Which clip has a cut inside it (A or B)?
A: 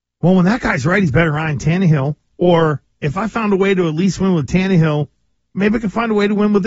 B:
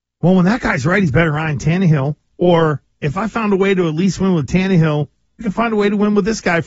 B